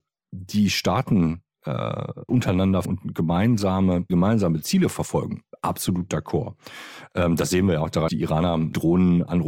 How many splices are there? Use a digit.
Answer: 4